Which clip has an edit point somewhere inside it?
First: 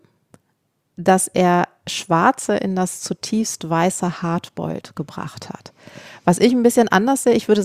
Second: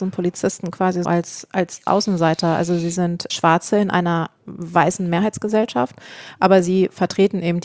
second; 3 cuts; at 1.0 s, 1.9 s, 3.3 s

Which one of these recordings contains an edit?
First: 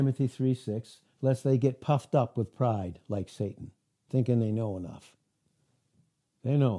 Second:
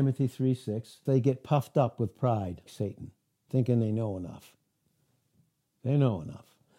second; 2 cuts; at 1.1 s, 2.7 s

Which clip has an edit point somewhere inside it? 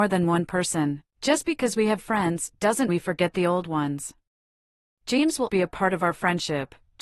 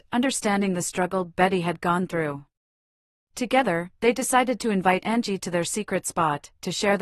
first; 4 cuts; at 1.1 s, 2.0 s, 2.9 s, 5.5 s

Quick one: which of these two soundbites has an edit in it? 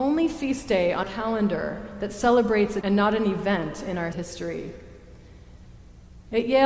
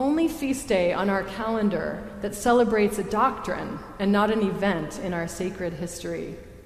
first; 3 cuts; at 1.0 s, 2.8 s, 4.1 s

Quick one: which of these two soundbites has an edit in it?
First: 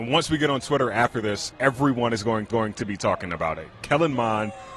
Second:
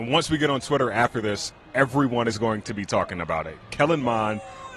first; 2 cuts; at 1.5 s, 2.5 s

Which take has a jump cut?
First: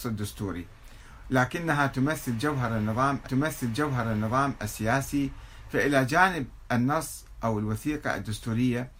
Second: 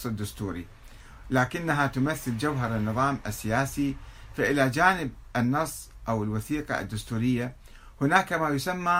first; 1 cut; at 3.2 s

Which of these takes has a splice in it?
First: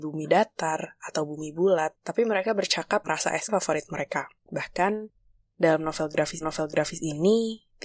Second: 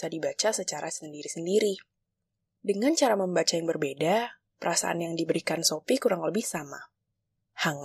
first; 5 cuts; at 2.0 s, 3.0 s, 3.5 s, 4.4 s, 6.4 s

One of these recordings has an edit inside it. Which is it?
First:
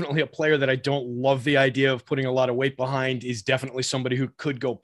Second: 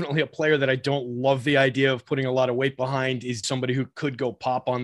second; 1 cut; at 3.4 s

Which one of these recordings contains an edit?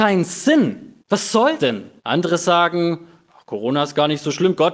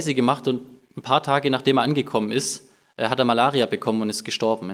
first; 3 cuts; at 1.0 s, 1.6 s, 2.0 s

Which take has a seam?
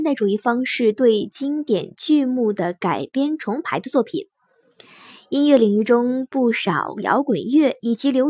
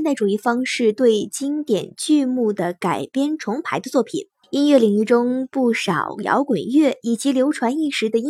second; 1 cut; at 4.4 s

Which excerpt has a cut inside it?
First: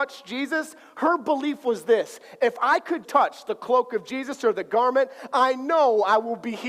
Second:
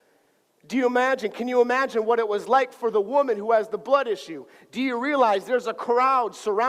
first; 1 cut; at 3.0 s

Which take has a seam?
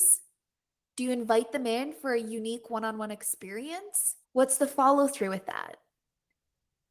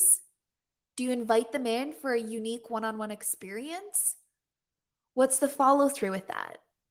first; 1 cut; at 4.2 s

